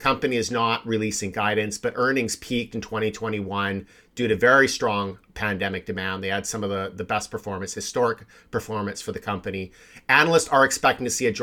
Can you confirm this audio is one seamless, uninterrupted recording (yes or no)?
yes